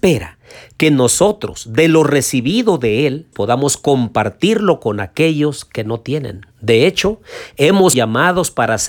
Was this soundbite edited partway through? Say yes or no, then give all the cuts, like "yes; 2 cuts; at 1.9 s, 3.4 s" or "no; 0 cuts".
yes; 3 cuts; at 3.3 s, 6.5 s, 7.9 s